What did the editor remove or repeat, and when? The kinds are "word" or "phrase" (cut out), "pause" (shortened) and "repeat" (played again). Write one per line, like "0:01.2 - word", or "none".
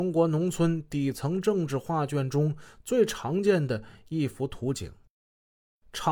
none

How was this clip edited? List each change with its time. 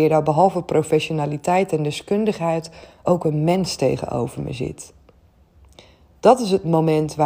none

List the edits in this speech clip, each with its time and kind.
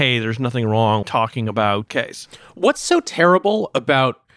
0:01.0 - word
0:01.9 - word

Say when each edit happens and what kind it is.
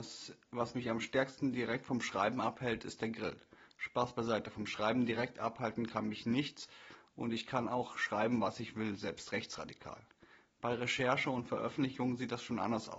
none

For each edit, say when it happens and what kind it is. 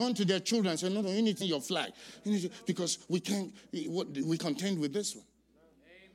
0:01.4 - word
0:04.4 - word

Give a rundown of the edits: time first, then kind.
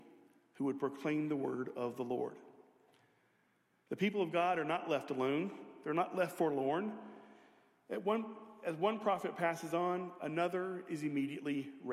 none

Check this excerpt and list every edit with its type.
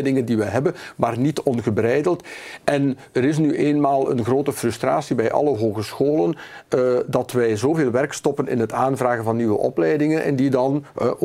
none

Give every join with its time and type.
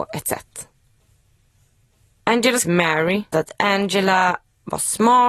0:02.6 - word
0:03.3 - word

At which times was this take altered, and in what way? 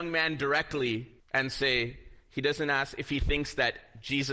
0:01.2 - pause

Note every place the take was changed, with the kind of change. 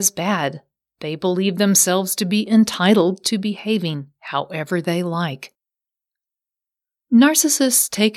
none

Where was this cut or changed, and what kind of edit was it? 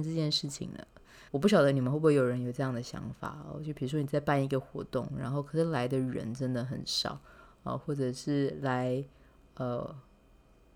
0:01.3 - pause

